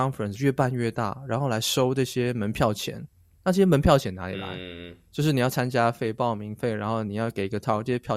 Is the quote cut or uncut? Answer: uncut